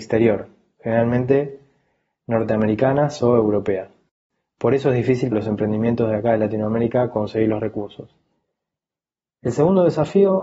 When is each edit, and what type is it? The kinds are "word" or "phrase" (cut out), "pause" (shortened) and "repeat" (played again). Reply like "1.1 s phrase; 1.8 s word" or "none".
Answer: 5.3 s word